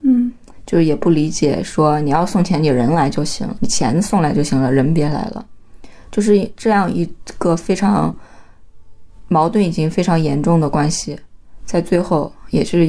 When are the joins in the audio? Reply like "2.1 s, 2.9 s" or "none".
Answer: 3.6 s